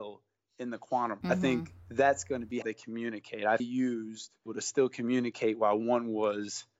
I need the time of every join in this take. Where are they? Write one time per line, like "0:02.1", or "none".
0:01.2
0:01.8
0:02.6
0:03.6
0:04.5